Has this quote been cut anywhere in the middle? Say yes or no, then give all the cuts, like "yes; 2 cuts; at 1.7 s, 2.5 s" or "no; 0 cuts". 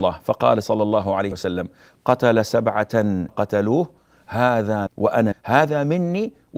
yes; 4 cuts; at 1.3 s, 3.3 s, 4.9 s, 5.3 s